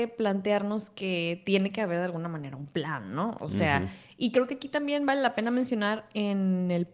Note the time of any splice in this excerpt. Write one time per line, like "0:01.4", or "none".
none